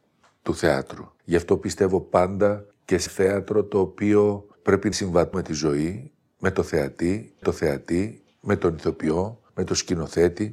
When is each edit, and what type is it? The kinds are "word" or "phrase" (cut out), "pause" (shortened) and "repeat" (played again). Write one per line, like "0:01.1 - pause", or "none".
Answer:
0:01.2 - pause
0:02.7 - pause
0:03.1 - word
0:04.5 - pause
0:04.9 - word
0:05.3 - word
0:07.4 - repeat
0:09.5 - pause